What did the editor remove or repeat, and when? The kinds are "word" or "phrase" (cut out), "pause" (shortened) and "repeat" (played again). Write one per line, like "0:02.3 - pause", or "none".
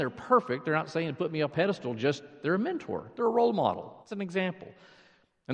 0:01.5 - phrase
0:04.0 - pause